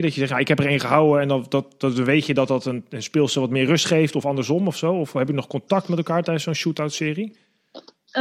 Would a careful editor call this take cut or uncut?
uncut